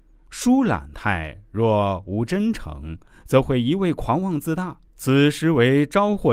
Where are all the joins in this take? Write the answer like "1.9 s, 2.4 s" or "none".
4.9 s

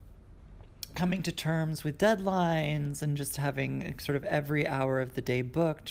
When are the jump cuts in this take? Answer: none

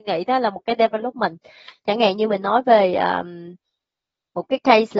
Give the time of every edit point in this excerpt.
none

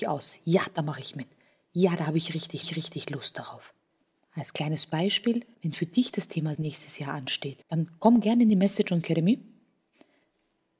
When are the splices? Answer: 2.6 s, 3.9 s, 5.5 s, 6.5 s, 7.6 s, 9.0 s

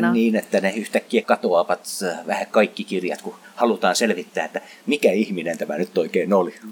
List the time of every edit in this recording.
1.2 s

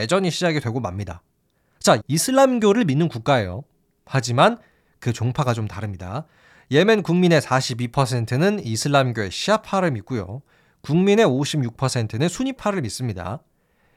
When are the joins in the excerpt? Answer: 2.0 s

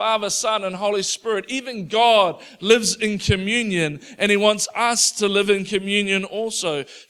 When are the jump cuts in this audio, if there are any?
none

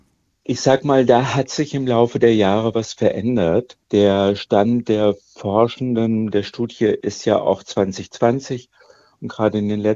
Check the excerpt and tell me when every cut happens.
3.8 s

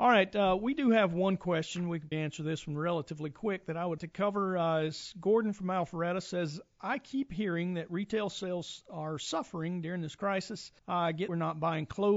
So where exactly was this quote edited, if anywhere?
2.1 s, 4.0 s, 10.8 s, 11.3 s

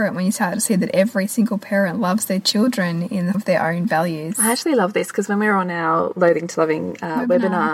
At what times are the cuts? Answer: 3.3 s

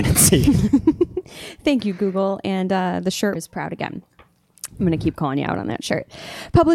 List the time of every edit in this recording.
3.3 s

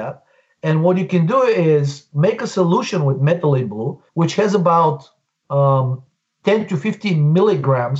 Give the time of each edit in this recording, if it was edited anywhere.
4.1 s

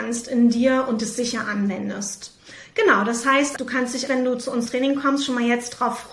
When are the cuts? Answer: 3.6 s, 4.1 s, 4.7 s

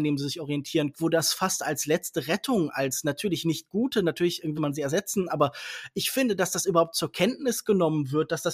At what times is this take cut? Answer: 0.9 s, 4.6 s

